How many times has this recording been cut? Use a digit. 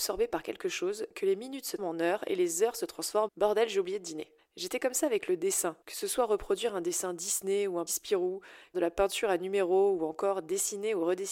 6